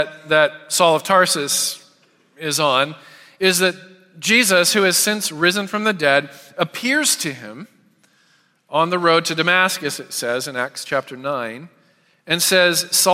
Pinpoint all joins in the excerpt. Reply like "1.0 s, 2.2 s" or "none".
none